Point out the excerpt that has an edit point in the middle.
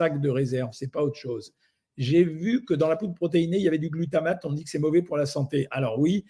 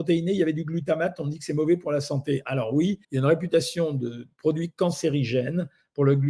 second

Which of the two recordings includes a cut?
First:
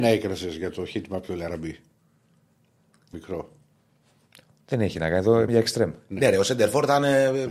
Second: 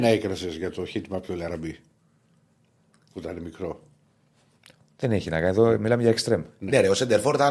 first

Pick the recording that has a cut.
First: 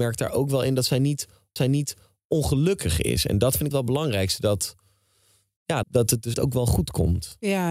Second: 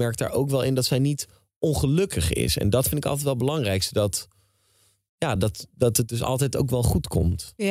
first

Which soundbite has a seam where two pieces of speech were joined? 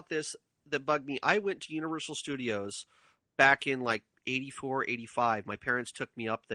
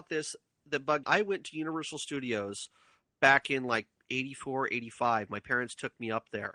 second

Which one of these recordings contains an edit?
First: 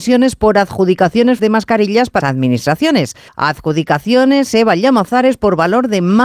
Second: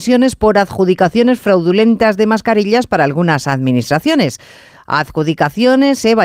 first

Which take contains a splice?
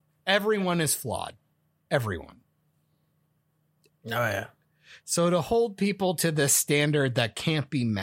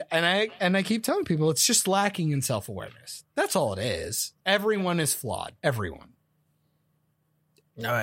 second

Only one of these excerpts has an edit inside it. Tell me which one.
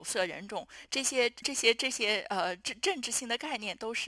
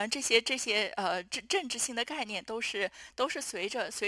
first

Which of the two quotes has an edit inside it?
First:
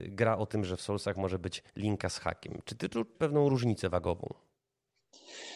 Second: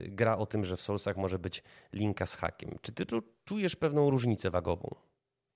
first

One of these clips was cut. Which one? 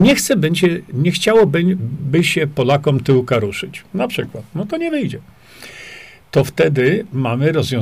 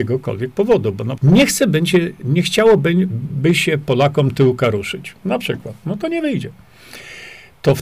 second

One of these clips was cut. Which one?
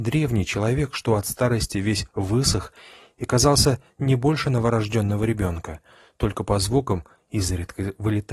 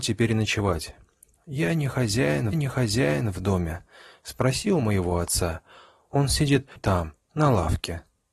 second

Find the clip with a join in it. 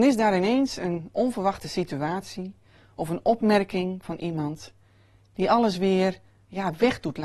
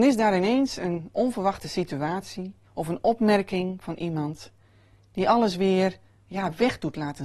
second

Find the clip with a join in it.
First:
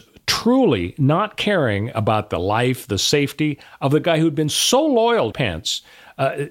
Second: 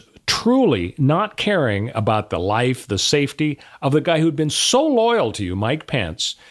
first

